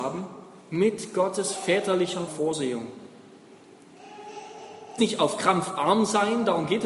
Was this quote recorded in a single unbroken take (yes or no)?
no